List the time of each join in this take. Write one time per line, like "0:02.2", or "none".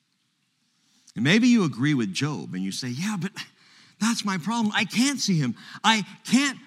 none